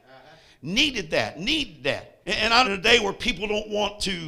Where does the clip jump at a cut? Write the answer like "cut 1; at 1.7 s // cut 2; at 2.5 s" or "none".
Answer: cut 1; at 2.2 s // cut 2; at 2.6 s